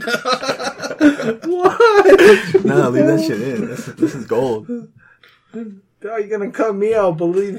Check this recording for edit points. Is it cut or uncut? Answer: uncut